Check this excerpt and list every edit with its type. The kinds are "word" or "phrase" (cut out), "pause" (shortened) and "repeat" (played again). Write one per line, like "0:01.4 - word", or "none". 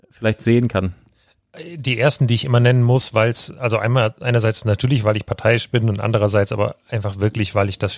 none

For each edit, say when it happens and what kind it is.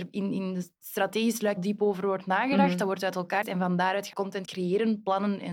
0:01.6 - word
0:03.4 - word
0:04.1 - word
0:04.4 - word

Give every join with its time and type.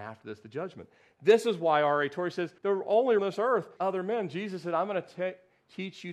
0:02.6 - pause
0:03.2 - phrase
0:03.8 - phrase

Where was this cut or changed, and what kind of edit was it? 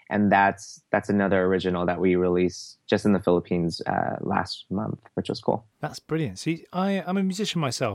0:05.1 - pause
0:05.7 - pause

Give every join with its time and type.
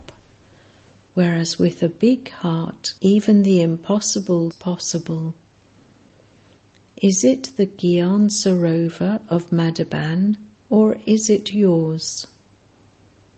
0:03.0 - pause
0:04.5 - word
0:10.6 - pause

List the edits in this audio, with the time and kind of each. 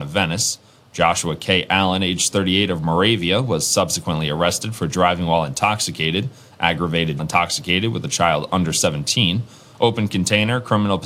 0:07.2 - phrase

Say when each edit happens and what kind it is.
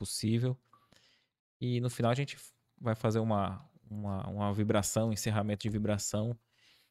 none

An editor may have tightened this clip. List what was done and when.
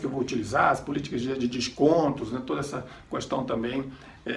none

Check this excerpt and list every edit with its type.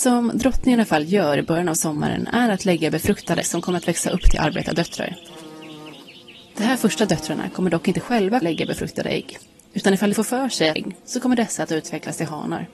0:03.4 - word
0:08.4 - word
0:10.1 - word
0:10.8 - word

